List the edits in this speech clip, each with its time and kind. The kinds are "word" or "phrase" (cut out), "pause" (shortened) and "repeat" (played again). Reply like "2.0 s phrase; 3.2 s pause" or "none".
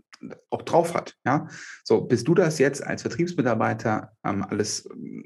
none